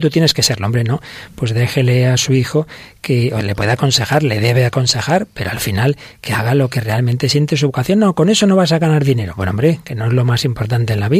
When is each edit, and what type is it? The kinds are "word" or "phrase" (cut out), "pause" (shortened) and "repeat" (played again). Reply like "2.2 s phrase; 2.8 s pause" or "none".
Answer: none